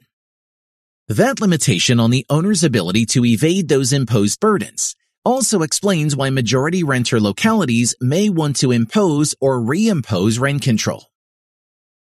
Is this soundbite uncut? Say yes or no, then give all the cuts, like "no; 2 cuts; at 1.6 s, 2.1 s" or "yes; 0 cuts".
yes; 0 cuts